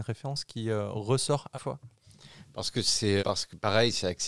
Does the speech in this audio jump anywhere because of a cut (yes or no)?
yes